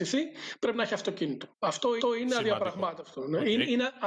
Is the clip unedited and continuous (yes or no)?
no